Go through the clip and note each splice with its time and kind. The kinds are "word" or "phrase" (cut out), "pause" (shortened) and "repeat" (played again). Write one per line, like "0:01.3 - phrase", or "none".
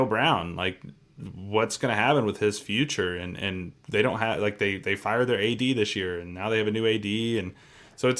none